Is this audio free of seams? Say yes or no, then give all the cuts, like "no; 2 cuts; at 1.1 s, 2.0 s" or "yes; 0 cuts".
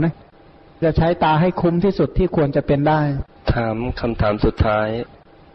no; 1 cut; at 3.4 s